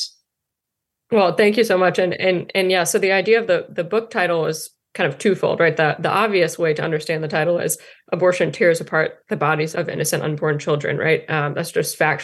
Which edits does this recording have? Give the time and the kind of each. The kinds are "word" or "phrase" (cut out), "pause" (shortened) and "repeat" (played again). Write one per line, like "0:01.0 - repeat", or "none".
0:09.7 - word